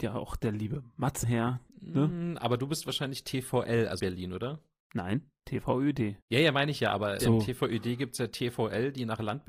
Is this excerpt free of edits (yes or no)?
no